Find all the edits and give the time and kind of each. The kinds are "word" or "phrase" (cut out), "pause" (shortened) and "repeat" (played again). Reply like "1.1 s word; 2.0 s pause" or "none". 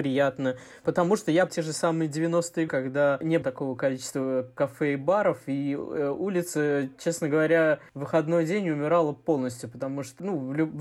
1.5 s word; 2.7 s word; 3.4 s word